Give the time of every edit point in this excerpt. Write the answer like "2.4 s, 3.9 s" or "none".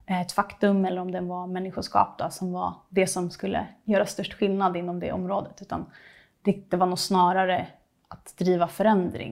none